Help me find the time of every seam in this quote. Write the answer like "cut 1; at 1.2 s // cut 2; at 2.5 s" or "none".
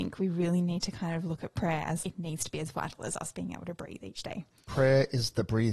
cut 1; at 2.0 s

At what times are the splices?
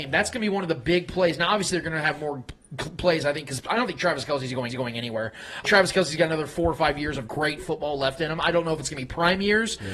cut 1; at 4.7 s // cut 2; at 5.6 s // cut 3; at 7.3 s

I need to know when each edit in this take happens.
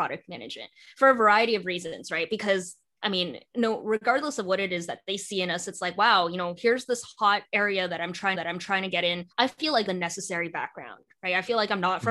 cut 1; at 8.3 s // cut 2; at 9.3 s // cut 3; at 9.9 s

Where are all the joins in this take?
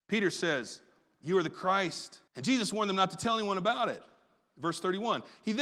cut 1; at 2.3 s

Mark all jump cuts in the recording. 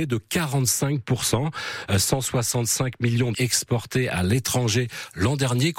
cut 1; at 3.3 s

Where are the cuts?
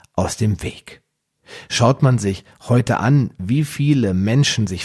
none

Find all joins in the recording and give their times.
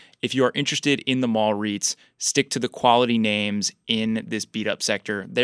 none

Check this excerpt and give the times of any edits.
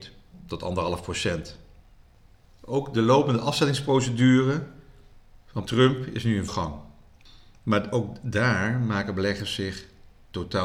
cut 1; at 5.7 s // cut 2; at 6.5 s

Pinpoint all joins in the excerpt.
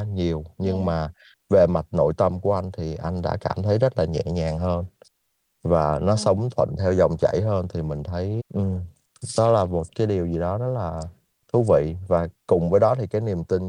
cut 1; at 8.4 s

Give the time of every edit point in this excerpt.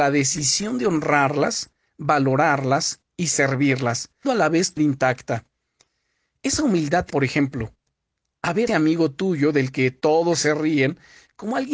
cut 1; at 4.2 s // cut 2; at 4.8 s // cut 3; at 7.1 s // cut 4; at 8.7 s

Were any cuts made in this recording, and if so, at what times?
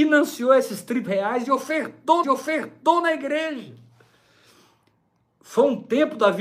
cut 1; at 1.1 s // cut 2; at 2.2 s

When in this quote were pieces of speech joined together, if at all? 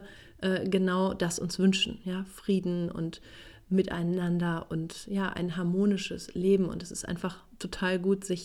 none

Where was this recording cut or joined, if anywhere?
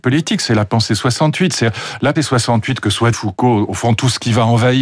cut 1; at 2.2 s // cut 2; at 3.1 s

